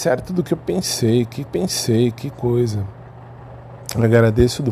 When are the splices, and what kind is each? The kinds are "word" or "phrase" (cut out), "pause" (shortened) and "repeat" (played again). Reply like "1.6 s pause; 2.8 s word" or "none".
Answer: 1.5 s repeat